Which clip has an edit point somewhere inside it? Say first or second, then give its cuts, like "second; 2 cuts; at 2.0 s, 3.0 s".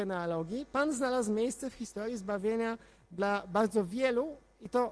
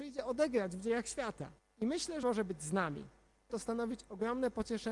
second; 3 cuts; at 1.6 s, 2.2 s, 3.5 s